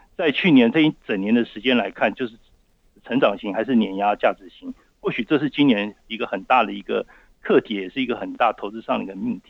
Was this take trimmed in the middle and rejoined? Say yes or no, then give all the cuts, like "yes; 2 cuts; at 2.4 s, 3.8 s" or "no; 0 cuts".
no; 0 cuts